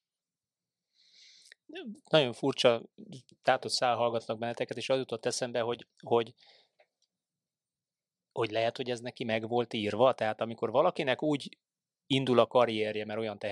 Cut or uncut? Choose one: uncut